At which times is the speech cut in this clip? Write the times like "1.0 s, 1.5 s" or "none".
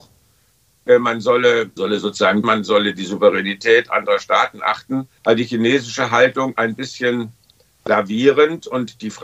1.8 s, 2.4 s, 5.2 s, 6.6 s